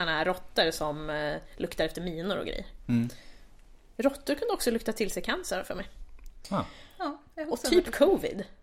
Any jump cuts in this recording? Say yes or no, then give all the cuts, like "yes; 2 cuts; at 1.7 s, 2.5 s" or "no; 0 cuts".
no; 0 cuts